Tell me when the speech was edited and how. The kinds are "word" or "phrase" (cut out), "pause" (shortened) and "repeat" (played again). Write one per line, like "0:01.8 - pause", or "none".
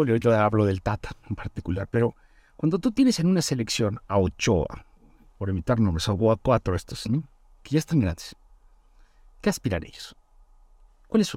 none